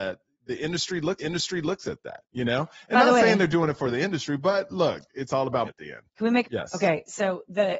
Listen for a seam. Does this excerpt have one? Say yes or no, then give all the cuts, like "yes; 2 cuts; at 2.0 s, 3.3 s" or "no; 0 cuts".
yes; 5 cuts; at 1.2 s, 2.2 s, 5.6 s, 6.1 s, 6.4 s